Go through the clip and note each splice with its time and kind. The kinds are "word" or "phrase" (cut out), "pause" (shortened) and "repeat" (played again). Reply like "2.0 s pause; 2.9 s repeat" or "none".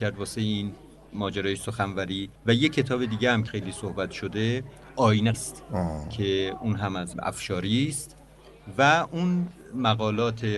2.4 s pause; 3.5 s word; 5.3 s word; 7.1 s word